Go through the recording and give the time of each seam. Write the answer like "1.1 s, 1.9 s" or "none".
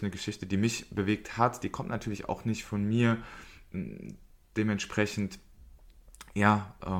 none